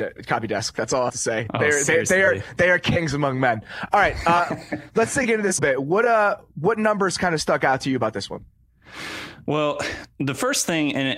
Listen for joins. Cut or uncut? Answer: cut